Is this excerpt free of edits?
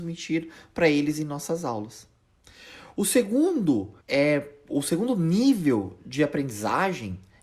no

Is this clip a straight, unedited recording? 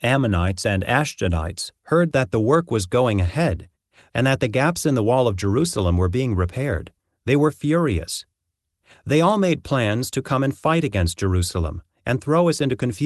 yes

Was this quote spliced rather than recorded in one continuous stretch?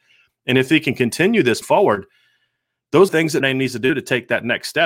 yes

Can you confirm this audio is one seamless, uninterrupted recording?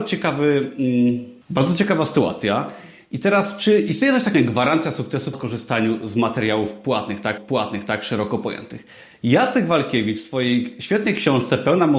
no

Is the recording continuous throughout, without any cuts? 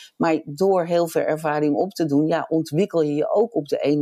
yes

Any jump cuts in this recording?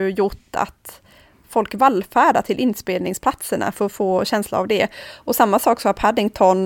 no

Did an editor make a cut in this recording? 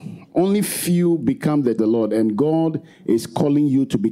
yes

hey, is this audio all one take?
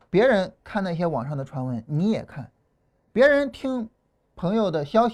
yes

